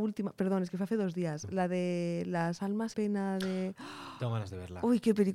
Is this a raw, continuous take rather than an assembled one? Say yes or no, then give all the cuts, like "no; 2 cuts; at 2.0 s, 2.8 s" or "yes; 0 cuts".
no; 1 cut; at 2.9 s